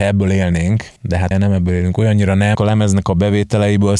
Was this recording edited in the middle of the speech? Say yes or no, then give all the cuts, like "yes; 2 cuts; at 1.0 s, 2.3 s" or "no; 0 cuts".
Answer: yes; 3 cuts; at 1.0 s, 1.3 s, 2.5 s